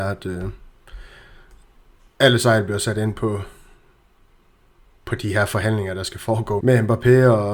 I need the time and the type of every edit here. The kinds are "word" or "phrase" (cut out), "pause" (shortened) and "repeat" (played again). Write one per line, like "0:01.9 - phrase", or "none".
0:06.6 - word